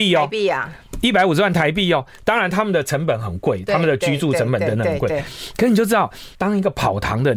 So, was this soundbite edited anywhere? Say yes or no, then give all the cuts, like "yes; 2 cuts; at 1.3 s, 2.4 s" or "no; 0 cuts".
yes; 1 cut; at 6.3 s